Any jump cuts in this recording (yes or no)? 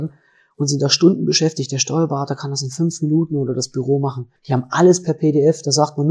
yes